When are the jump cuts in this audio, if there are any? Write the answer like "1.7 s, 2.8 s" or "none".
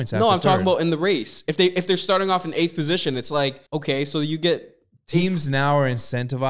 3.7 s